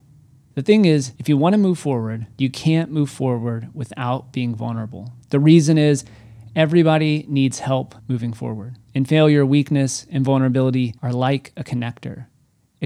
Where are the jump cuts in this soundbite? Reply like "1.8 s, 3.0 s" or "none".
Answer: 1.2 s, 2.3 s, 5.2 s, 8.0 s, 8.8 s, 11.0 s